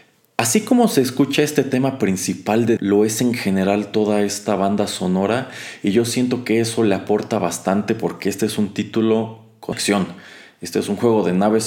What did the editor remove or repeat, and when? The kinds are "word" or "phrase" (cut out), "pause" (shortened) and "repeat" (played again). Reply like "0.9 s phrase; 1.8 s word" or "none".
2.8 s word; 9.7 s word